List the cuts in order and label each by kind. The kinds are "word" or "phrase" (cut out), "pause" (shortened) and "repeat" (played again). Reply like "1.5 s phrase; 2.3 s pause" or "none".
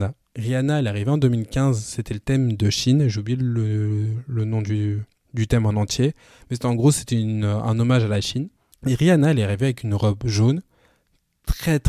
none